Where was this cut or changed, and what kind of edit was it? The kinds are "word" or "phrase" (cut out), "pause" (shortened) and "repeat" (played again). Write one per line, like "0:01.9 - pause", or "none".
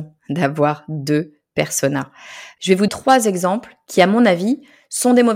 0:02.9 - word